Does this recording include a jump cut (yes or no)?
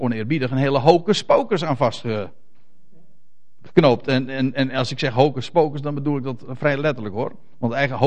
no